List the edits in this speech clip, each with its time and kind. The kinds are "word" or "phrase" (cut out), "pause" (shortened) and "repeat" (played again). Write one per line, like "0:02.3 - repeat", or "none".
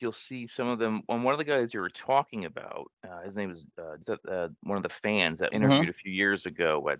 0:02.9 - pause
0:04.0 - phrase
0:05.5 - word